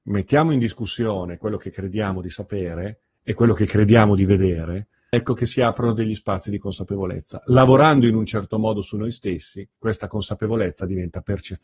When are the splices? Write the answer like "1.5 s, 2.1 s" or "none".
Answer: 5.1 s, 9.8 s